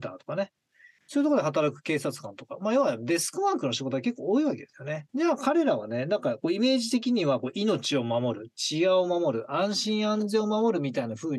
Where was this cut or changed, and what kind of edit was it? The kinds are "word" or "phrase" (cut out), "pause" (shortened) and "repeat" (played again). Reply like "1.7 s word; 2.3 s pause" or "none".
5.1 s pause